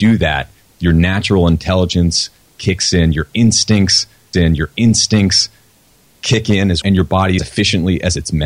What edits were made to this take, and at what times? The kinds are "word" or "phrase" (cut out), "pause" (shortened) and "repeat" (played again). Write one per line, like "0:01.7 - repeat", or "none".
0:04.3 - repeat
0:06.8 - word
0:07.4 - phrase